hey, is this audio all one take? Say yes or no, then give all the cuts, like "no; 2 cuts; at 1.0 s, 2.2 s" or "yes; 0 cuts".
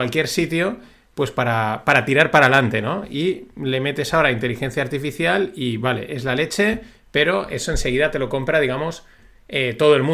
yes; 0 cuts